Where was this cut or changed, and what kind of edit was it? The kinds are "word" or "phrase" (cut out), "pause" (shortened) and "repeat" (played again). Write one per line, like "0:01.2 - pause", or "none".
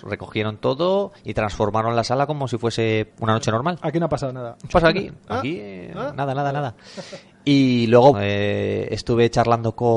0:03.1 - pause
0:04.7 - phrase
0:08.1 - word